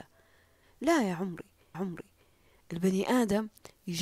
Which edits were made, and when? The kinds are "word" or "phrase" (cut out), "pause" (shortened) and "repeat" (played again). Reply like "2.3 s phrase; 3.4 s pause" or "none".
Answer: 1.7 s repeat